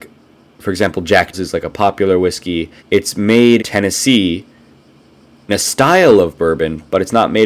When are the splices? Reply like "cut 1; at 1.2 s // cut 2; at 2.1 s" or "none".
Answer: cut 1; at 1.3 s // cut 2; at 2.8 s // cut 3; at 3.6 s // cut 4; at 5.5 s